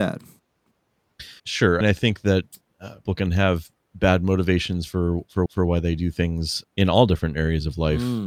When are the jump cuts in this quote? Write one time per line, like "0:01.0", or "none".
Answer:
0:01.4
0:01.8
0:03.1
0:03.7
0:05.5
0:06.6